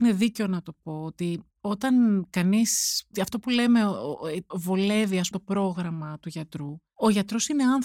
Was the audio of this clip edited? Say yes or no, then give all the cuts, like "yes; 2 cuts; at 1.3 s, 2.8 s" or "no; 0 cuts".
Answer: yes; 4 cuts; at 1.5 s, 3.1 s, 4.5 s, 5.3 s